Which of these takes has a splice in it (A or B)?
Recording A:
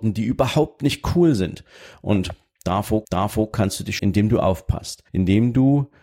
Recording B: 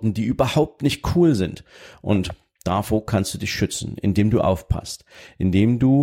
A